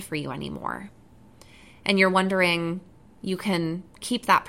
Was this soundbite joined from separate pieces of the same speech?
yes; 1 cut; at 3.2 s

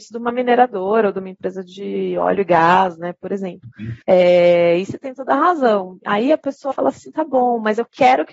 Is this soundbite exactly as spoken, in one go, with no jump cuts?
no; 2 cuts; at 4.0 s, 6.7 s

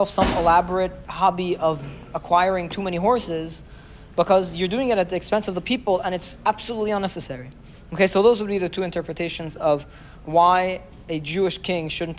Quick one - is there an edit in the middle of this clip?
no; 0 cuts

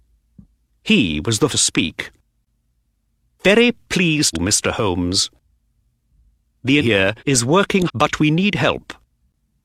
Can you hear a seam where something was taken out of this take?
yes; 5 cuts; at 1.5 s, 4.3 s, 6.8 s, 7.2 s, 7.9 s

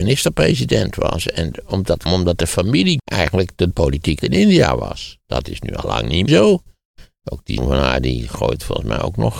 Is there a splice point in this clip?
yes; 6 cuts; at 2.1 s, 3.0 s, 3.7 s, 4.2 s, 6.3 s, 7.6 s

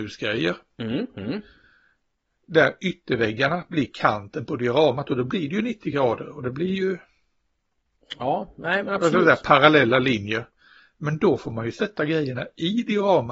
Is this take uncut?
yes; 0 cuts

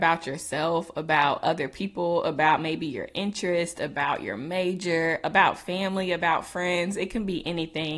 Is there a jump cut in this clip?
no; 0 cuts

